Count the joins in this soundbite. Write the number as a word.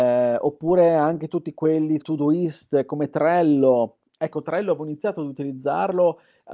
one